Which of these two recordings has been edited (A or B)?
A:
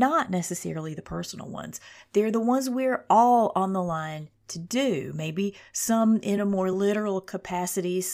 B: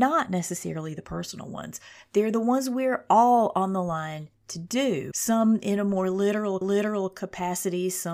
B